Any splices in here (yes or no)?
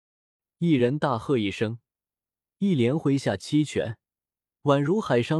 no